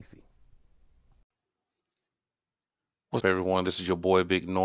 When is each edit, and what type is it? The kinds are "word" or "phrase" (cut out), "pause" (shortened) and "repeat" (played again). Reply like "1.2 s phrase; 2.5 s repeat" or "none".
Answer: 3.2 s word